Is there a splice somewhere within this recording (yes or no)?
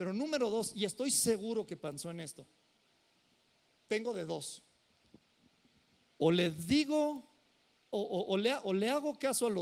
no